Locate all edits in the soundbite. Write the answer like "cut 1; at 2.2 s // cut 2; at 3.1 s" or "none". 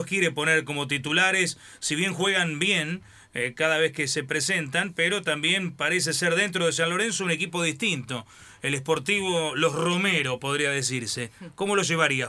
none